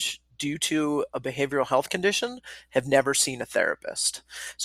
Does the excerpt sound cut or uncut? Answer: uncut